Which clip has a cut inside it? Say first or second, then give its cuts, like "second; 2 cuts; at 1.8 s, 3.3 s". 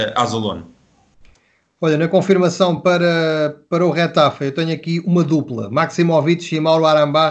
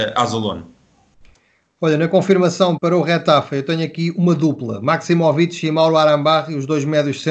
second; 1 cut; at 2.8 s